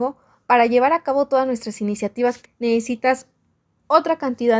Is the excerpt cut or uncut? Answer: cut